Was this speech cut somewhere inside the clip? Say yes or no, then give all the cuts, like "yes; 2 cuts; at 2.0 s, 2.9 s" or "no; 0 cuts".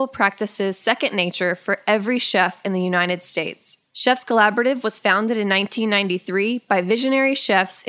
yes; 1 cut; at 3.9 s